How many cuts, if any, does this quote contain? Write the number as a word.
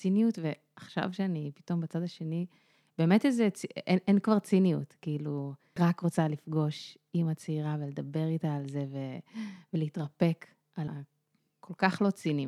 two